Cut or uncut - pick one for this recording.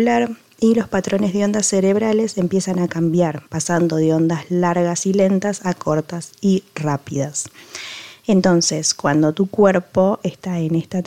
cut